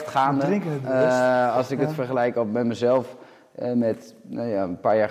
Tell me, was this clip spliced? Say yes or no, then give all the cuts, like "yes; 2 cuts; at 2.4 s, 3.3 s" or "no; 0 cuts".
no; 0 cuts